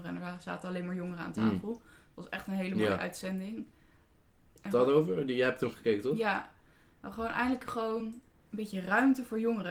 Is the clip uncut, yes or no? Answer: yes